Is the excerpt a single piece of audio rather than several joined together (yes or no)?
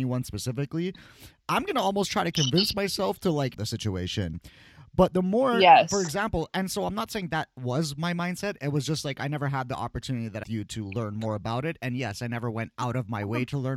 no